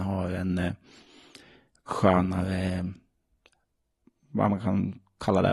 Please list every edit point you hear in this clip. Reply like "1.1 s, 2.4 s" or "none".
none